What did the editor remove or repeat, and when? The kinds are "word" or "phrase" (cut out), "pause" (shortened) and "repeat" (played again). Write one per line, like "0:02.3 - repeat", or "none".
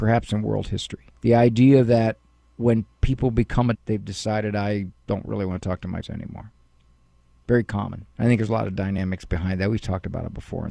0:01.2 - pause
0:02.4 - pause
0:03.7 - word
0:06.0 - word
0:08.1 - pause